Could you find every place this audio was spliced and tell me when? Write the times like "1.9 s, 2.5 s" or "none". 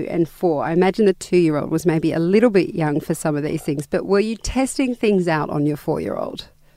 none